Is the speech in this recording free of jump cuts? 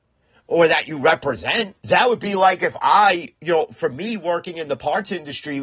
no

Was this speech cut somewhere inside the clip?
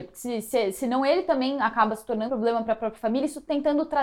yes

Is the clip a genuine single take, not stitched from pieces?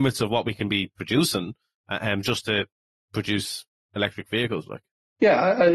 yes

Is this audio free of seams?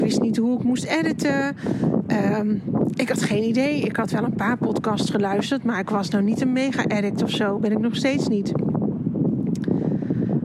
yes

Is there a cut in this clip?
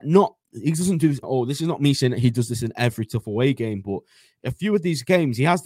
yes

